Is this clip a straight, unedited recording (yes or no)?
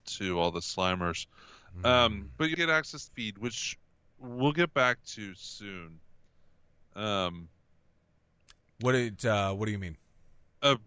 no